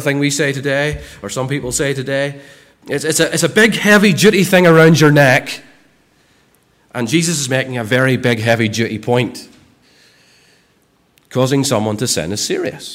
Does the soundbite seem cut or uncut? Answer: uncut